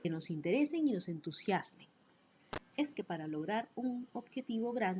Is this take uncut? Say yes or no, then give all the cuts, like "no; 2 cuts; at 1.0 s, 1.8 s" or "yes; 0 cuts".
no; 1 cut; at 2.9 s